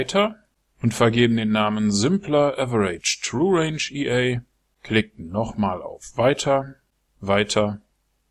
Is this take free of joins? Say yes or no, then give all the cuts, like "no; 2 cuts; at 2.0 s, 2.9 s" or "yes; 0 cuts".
yes; 0 cuts